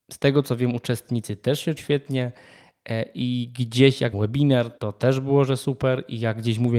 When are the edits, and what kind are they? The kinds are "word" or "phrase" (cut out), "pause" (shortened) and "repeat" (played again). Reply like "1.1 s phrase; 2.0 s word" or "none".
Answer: 1.8 s word; 4.1 s word; 4.8 s pause